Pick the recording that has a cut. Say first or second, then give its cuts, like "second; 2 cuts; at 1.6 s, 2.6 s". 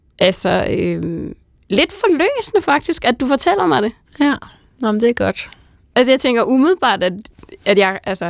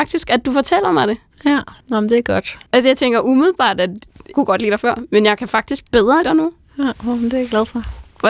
second; 4 cuts; at 1.8 s, 2.7 s, 4.3 s, 6.2 s